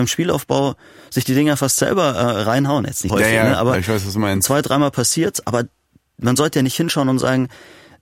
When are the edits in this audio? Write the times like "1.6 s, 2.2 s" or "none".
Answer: 3.1 s